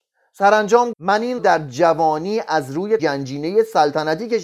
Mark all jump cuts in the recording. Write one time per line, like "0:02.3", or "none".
0:00.9
0:01.4
0:03.0